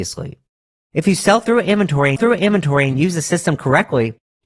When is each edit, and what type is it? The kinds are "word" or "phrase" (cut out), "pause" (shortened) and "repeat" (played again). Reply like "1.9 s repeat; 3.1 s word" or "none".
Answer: 2.2 s repeat